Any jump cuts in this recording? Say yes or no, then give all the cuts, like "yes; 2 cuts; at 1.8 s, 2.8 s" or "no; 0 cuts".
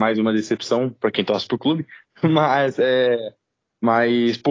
no; 0 cuts